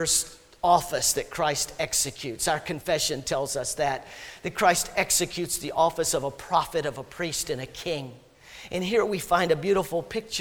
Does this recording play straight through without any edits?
yes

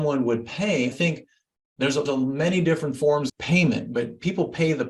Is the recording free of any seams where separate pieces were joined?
no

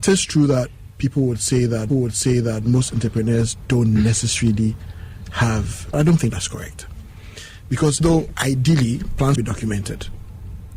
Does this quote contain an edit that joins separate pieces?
yes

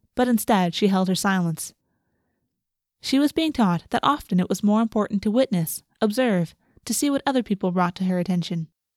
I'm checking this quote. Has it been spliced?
no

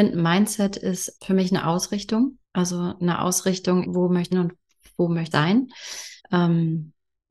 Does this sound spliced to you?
yes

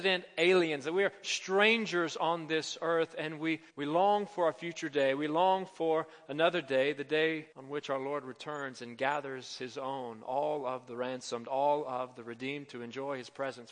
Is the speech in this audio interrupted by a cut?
yes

